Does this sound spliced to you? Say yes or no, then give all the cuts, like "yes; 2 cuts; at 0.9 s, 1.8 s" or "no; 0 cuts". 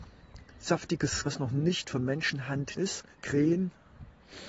yes; 3 cuts; at 1.2 s, 2.8 s, 3.1 s